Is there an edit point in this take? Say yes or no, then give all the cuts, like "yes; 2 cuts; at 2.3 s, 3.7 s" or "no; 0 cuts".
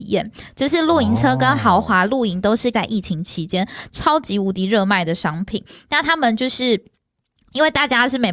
yes; 1 cut; at 2.7 s